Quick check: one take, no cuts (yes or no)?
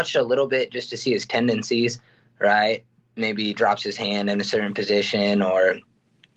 yes